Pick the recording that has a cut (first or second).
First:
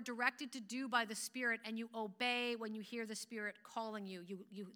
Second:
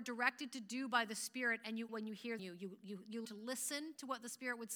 second